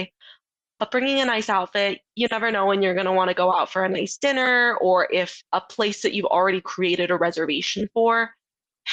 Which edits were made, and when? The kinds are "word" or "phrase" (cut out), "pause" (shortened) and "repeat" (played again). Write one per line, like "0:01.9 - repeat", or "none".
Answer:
0:02.1 - pause
0:05.5 - pause